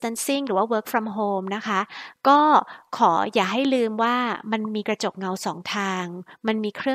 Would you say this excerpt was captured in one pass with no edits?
yes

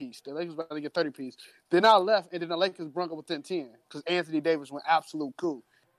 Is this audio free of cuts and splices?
yes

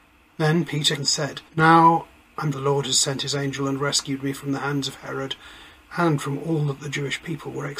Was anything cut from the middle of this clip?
yes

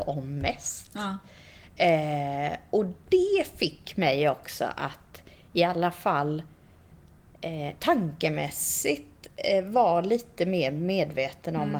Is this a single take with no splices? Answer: yes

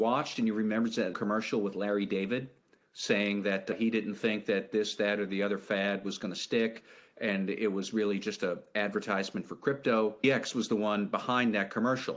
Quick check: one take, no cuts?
no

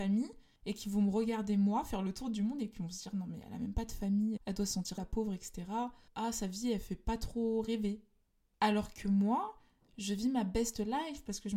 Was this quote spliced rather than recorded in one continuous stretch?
yes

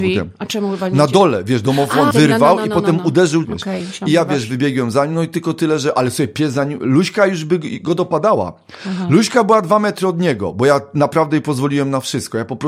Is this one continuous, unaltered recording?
no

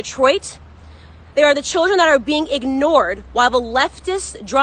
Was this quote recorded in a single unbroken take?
yes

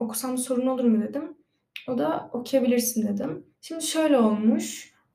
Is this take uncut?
no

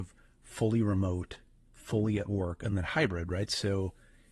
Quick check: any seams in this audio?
no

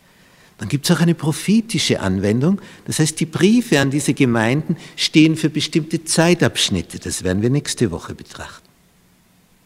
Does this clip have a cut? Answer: no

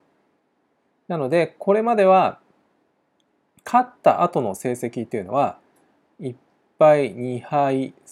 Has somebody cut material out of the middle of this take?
no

